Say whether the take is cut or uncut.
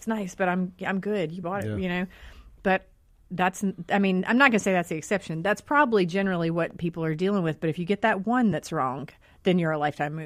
uncut